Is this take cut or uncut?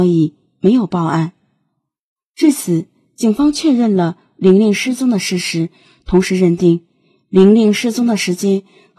uncut